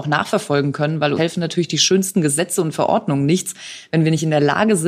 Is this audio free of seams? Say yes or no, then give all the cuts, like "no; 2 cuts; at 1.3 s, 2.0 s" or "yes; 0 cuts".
no; 1 cut; at 1.2 s